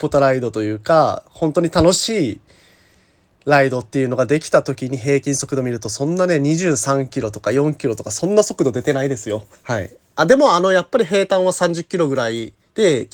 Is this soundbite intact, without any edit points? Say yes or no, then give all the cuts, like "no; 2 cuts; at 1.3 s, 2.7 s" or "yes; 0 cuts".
no; 1 cut; at 9.5 s